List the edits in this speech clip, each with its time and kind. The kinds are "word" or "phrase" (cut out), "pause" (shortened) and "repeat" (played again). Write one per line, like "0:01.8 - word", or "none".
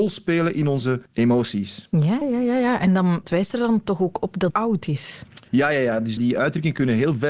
0:01.1 - pause
0:02.2 - word
0:03.2 - word
0:04.5 - phrase
0:05.5 - pause
0:06.2 - word